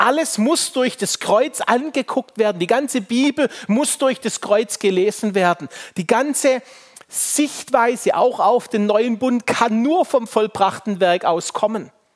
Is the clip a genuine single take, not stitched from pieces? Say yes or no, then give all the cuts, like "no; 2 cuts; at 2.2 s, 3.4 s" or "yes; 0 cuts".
yes; 0 cuts